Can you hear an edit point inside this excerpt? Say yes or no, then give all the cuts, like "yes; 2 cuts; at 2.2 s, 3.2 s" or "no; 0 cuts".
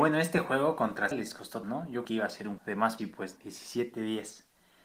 yes; 6 cuts; at 1.1 s, 1.6 s, 2.0 s, 2.6 s, 3.0 s, 3.4 s